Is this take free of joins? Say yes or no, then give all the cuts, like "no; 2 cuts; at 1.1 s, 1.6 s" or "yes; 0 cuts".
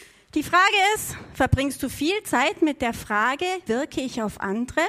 no; 1 cut; at 3.7 s